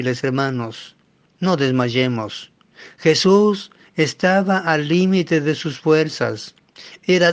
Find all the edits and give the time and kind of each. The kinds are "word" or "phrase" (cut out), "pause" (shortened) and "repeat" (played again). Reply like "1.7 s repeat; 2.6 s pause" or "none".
none

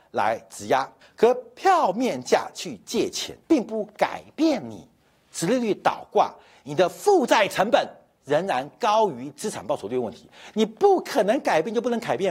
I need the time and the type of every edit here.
1.0 s pause; 3.4 s pause

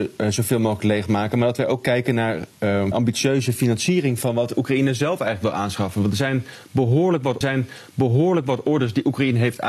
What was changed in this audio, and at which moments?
2.9 s phrase; 7.4 s repeat

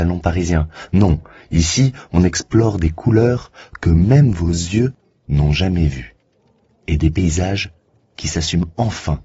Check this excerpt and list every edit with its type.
none

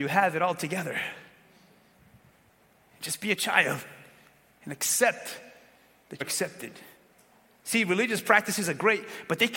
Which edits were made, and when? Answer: 6.2 s word

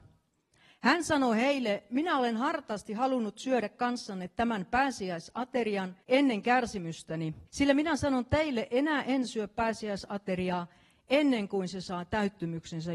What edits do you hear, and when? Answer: 6.0 s pause; 7.5 s pause

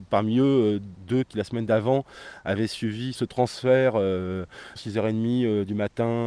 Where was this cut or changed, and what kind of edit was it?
3.1 s word; 4.8 s word

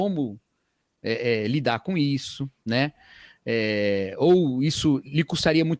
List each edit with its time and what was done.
none

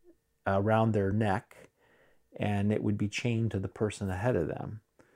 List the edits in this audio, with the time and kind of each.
none

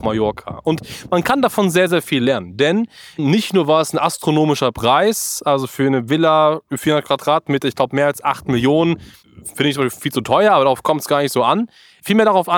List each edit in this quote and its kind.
none

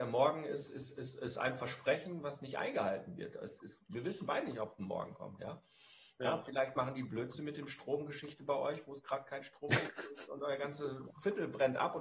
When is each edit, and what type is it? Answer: none

